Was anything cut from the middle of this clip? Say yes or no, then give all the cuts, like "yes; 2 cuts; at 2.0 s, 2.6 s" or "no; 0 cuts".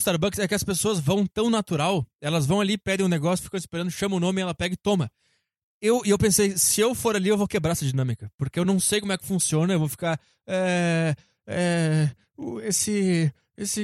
no; 0 cuts